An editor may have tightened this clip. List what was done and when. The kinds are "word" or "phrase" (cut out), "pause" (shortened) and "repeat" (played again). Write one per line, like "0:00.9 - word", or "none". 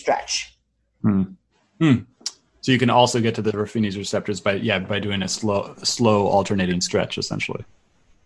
none